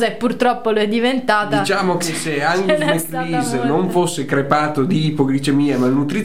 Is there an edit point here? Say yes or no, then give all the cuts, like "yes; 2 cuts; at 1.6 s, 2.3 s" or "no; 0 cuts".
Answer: no; 0 cuts